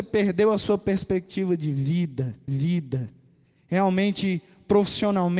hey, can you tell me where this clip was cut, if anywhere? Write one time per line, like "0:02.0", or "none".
0:02.5